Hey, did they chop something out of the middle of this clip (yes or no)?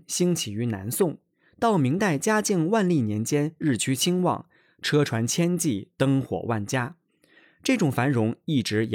no